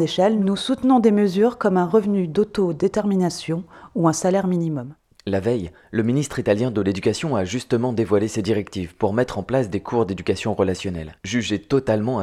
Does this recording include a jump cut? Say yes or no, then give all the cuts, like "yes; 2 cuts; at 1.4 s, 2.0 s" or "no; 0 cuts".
yes; 2 cuts; at 5.0 s, 11.2 s